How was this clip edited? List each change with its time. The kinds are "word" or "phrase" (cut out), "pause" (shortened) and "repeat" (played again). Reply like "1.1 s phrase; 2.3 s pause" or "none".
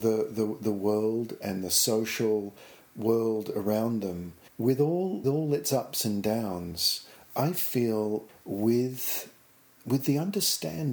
4.5 s pause; 5.2 s word; 8.3 s phrase